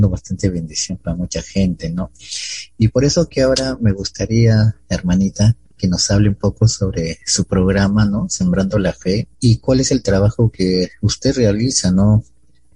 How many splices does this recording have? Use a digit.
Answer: 1